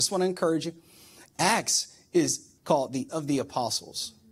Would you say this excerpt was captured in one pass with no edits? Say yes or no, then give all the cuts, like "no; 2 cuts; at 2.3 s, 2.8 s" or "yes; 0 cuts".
no; 2 cuts; at 2.6 s, 3.1 s